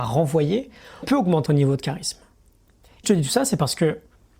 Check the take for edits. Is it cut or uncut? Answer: cut